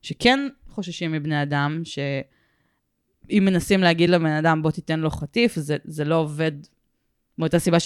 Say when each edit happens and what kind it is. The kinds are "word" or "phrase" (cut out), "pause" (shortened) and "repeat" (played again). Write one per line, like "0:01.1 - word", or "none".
none